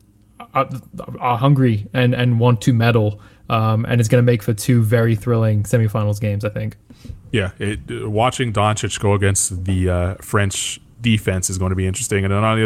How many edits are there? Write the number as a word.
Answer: zero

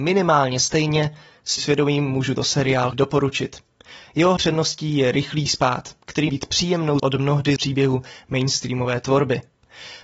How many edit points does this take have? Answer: eight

